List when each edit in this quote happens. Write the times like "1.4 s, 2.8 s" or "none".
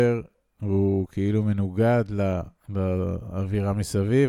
2.6 s